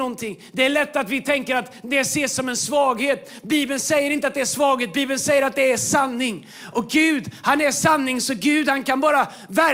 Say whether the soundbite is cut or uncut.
uncut